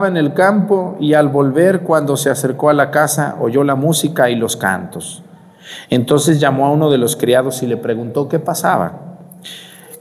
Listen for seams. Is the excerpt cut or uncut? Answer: uncut